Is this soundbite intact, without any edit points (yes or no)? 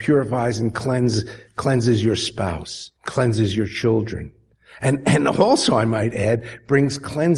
no